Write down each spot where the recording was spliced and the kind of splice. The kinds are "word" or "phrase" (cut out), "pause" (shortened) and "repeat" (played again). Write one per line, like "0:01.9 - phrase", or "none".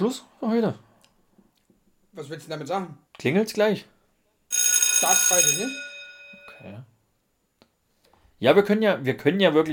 0:03.1 - pause
0:05.3 - word